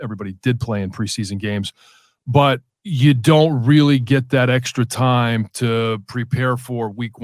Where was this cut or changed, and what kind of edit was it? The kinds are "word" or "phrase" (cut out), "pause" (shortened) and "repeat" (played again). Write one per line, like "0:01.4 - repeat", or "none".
0:02.8 - pause

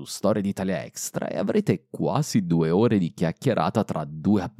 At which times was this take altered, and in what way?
none

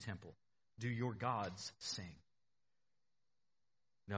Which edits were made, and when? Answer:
none

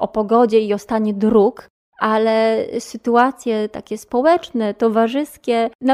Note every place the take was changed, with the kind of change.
none

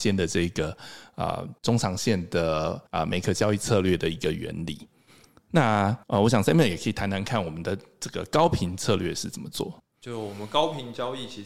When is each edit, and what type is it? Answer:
0:01.6 - pause
0:02.9 - pause
0:06.0 - pause
0:09.8 - pause

